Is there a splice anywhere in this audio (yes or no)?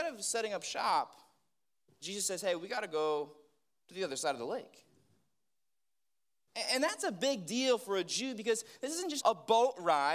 yes